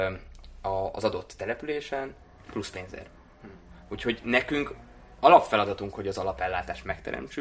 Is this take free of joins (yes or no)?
yes